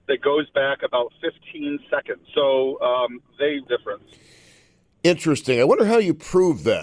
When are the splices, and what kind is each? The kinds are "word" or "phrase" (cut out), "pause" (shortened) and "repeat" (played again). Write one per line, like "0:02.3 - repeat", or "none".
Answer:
0:02.2 - pause
0:03.6 - phrase